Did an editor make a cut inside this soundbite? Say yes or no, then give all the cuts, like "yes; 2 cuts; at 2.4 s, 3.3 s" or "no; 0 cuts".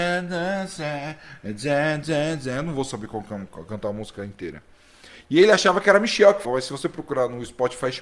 yes; 1 cut; at 6.4 s